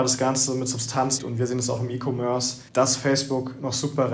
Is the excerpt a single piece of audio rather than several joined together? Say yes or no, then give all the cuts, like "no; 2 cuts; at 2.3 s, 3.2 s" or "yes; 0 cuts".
no; 2 cuts; at 1.2 s, 2.7 s